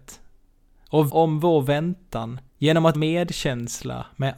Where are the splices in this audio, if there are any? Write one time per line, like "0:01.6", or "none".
0:01.1
0:02.5
0:02.9